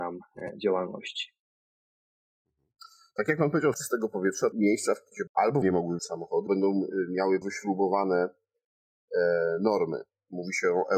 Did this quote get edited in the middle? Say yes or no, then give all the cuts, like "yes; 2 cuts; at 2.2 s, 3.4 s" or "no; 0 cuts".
yes; 7 cuts; at 3.7 s, 4.5 s, 5.3 s, 5.6 s, 6.0 s, 6.5 s, 7.4 s